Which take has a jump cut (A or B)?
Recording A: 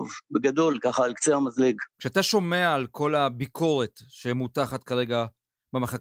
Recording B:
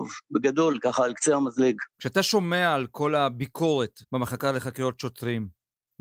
B